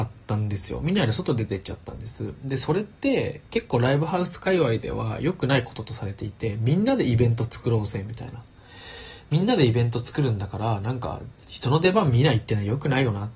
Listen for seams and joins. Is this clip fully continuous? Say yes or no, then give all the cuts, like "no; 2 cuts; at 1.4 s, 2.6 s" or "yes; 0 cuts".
no; 1 cut; at 11.4 s